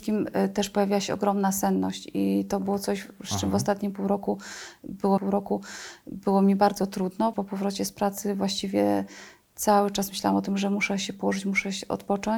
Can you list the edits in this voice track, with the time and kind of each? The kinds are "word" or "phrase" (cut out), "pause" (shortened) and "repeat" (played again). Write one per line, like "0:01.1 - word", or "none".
0:05.2 - repeat
0:07.3 - word